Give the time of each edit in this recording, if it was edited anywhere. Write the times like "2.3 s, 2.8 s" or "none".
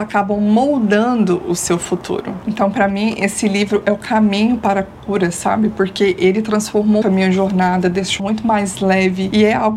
7.0 s, 8.2 s